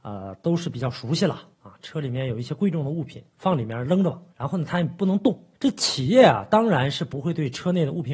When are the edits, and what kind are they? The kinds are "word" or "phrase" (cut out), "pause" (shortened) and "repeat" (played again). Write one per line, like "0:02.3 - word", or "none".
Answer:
0:01.5 - pause
0:04.3 - pause
0:05.5 - pause